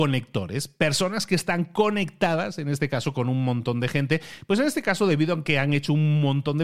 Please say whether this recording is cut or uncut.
uncut